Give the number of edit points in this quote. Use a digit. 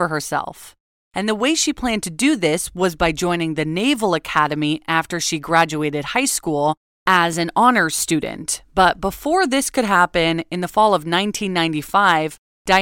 0